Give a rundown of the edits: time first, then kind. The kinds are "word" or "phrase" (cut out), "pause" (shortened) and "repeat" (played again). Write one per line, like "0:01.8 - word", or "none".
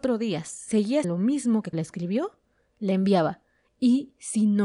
0:01.0 - word
0:01.7 - word

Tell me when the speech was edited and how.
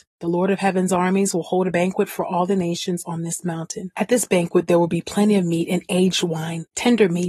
none

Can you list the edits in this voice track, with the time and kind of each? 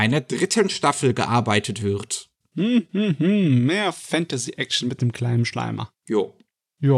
none

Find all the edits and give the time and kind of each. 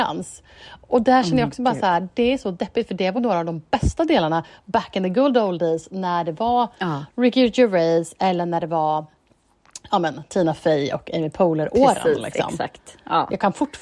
0:03.2 - word

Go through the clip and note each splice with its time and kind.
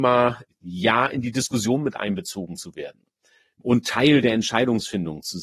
none

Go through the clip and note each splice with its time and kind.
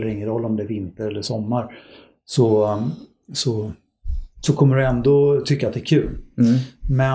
none

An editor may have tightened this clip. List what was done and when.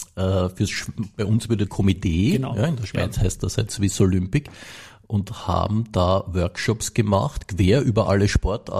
0:01.7 - phrase

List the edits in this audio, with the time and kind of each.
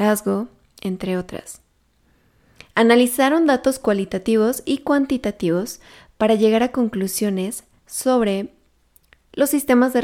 none

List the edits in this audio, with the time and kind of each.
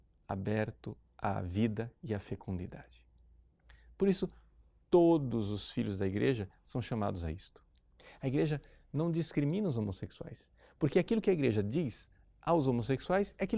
none

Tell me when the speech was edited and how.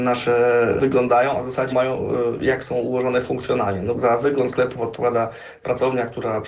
0:01.7 - word
0:03.9 - word

